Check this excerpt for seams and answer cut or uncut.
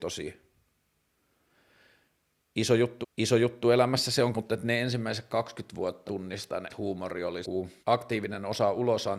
cut